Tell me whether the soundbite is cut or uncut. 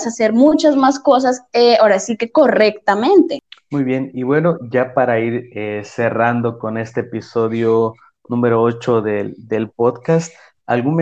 uncut